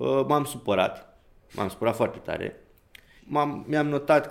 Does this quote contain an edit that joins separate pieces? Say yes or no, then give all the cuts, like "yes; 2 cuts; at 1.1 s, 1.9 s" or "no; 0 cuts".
yes; 2 cuts; at 1.4 s, 3.2 s